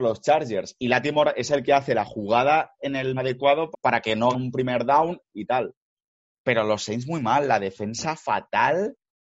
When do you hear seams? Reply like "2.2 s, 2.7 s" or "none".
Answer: 3.2 s, 3.7 s, 4.3 s, 5.3 s

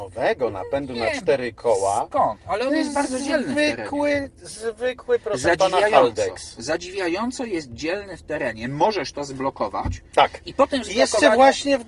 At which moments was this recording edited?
none

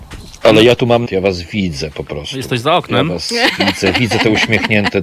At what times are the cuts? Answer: 1.1 s

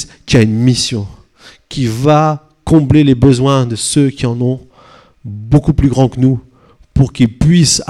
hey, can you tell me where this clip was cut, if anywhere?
none

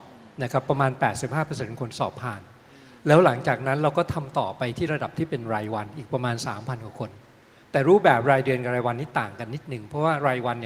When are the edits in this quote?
none

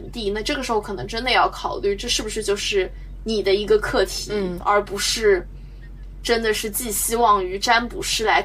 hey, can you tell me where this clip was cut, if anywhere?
4.6 s

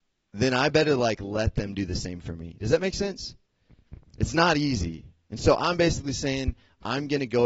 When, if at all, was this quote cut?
4.1 s

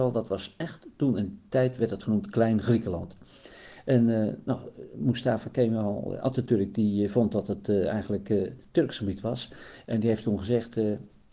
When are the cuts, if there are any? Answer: none

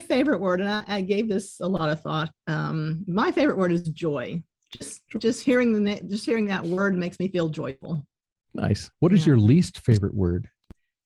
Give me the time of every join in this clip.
8.9 s

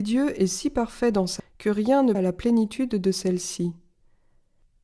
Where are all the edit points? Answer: 1.4 s, 2.1 s

